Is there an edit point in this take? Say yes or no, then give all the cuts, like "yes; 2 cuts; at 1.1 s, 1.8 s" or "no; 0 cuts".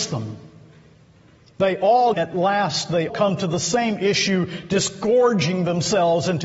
yes; 2 cuts; at 2.1 s, 3.1 s